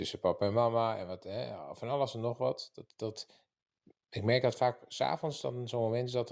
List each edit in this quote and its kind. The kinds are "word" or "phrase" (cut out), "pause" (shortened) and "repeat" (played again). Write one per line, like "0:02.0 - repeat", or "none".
none